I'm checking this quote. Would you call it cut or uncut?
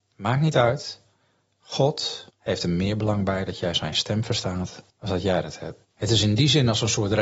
cut